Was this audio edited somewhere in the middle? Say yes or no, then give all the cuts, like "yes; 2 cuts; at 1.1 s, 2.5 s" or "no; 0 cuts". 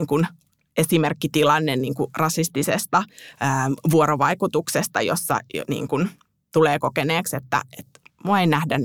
no; 0 cuts